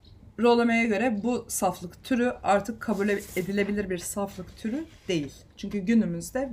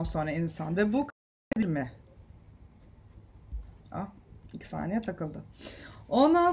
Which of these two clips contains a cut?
second; 1 cut; at 3.8 s

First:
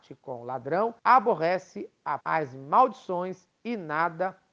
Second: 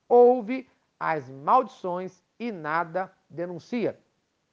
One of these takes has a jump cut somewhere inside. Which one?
first; 2 cuts; at 1.0 s, 2.2 s

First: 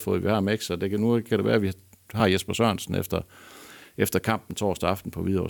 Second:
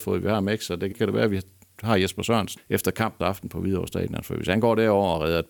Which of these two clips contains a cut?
second; 3 cuts; at 0.9 s, 2.6 s, 3.2 s

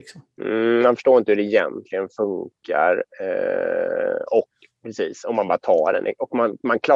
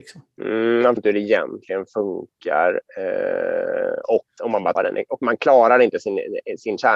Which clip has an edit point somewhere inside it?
second; 4 cuts; at 1.0 s, 4.4 s, 4.8 s, 5.2 s

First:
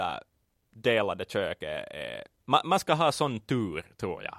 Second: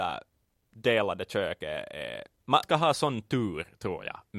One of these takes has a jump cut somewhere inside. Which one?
second; 1 cut; at 2.6 s

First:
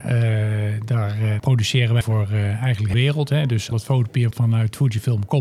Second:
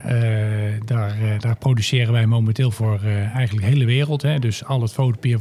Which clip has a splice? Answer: first; 5 cuts; at 1.4 s, 2.0 s, 2.9 s, 3.7 s, 4.3 s

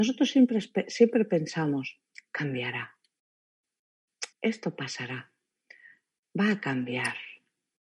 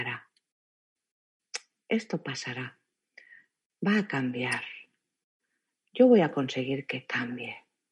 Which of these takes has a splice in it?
first; 1 cut; at 4.3 s

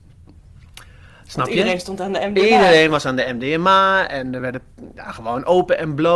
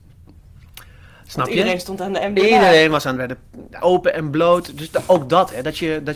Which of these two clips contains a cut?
second; 2 cuts; at 3.2 s, 3.8 s

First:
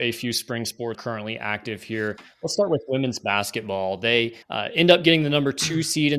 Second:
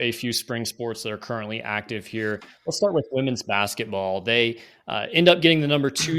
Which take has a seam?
first; 2 cuts; at 0.9 s, 4.4 s

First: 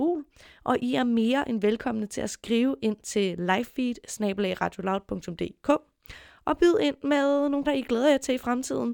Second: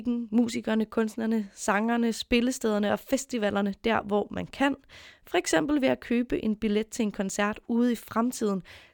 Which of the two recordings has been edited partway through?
first; 1 cut; at 7.6 s

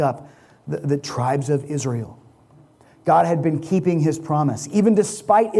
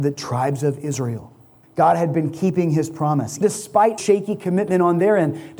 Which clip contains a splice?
second; 3 cuts; at 1.6 s, 3.4 s, 4.0 s

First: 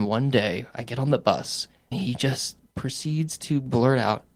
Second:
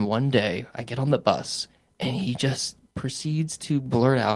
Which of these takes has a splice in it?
first; 1 cut; at 1.9 s

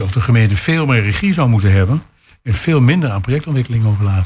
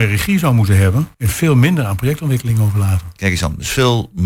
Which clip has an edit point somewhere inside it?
second; 1 cut; at 1.1 s

